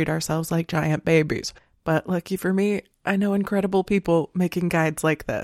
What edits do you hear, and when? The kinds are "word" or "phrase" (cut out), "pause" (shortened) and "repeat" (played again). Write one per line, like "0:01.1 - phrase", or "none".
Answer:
none